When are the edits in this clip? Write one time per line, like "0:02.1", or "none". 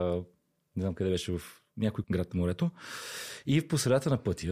0:02.0